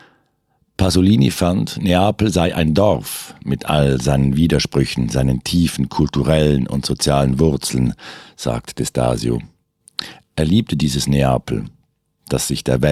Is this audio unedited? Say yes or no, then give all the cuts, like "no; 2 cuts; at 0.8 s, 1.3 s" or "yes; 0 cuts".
yes; 0 cuts